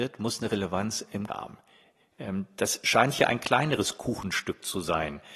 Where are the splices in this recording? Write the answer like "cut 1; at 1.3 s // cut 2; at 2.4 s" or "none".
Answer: cut 1; at 1.3 s